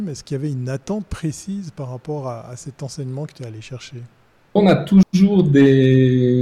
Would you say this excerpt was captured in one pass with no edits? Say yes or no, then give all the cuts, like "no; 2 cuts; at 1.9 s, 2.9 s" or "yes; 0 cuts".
no; 1 cut; at 4.6 s